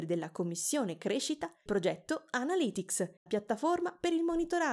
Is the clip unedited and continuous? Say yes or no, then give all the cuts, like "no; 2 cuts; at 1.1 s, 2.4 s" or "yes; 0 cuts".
no; 2 cuts; at 1.7 s, 3.3 s